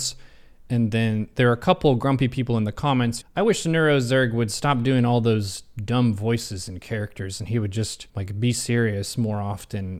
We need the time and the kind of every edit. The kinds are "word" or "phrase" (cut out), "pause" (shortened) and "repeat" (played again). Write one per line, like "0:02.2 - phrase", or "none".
0:03.2 - phrase
0:08.1 - pause